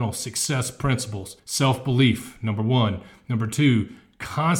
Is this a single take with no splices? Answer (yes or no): no